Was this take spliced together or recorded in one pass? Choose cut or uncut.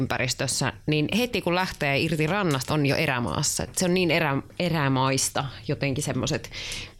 cut